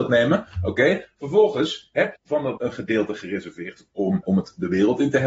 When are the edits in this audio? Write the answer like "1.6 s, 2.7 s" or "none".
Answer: 2.2 s, 2.6 s, 4.2 s